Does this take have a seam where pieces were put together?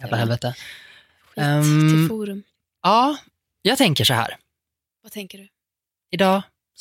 no; 0 cuts

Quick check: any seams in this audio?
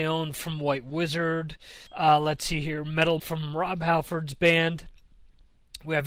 yes; 2 cuts; at 1.9 s, 3.2 s

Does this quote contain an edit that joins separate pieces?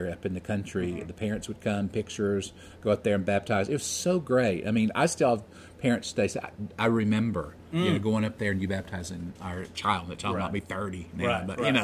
no; 0 cuts

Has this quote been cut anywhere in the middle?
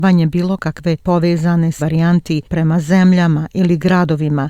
yes; 3 cuts; at 1.0 s, 1.8 s, 2.4 s

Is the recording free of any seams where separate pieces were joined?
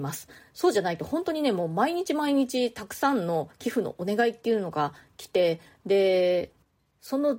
yes; 0 cuts

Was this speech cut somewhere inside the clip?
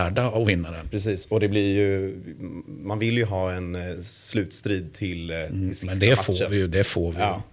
no; 0 cuts

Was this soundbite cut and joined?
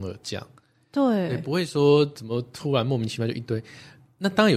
no; 0 cuts

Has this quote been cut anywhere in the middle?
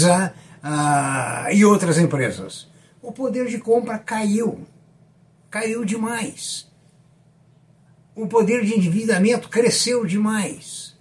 no; 0 cuts

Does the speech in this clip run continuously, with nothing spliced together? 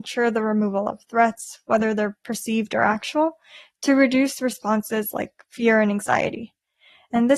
yes; 0 cuts

